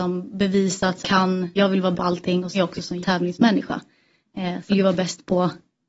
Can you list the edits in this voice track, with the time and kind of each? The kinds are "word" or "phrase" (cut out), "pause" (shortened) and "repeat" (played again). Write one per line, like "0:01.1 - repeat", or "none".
0:01.0 - phrase
0:01.6 - word
0:01.9 - word
0:02.5 - word
0:03.0 - word
0:04.7 - phrase